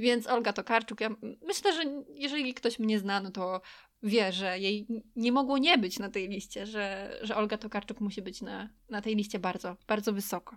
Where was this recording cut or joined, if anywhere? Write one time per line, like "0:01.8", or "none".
none